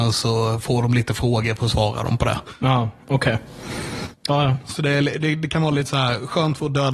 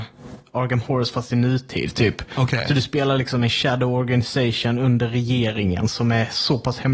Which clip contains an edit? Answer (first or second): first